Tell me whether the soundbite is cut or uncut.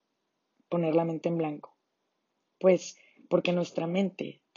uncut